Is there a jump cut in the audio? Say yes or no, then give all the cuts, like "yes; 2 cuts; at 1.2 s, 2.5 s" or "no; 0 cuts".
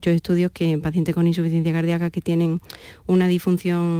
no; 0 cuts